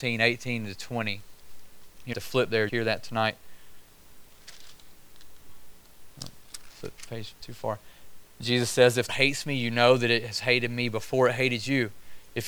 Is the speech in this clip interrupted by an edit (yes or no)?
yes